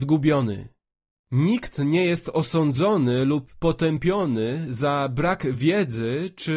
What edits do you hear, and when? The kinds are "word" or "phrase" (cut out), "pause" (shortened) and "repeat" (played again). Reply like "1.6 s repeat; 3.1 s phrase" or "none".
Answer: none